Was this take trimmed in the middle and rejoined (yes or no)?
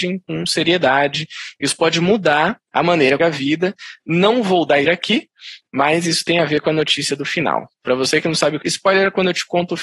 yes